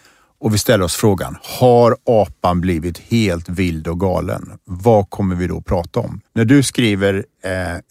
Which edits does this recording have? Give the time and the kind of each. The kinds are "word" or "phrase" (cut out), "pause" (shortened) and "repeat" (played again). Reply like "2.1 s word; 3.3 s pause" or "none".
6.3 s pause